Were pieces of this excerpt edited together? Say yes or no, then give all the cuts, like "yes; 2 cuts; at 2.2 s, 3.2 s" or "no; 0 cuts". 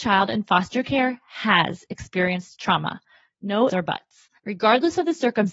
yes; 1 cut; at 3.7 s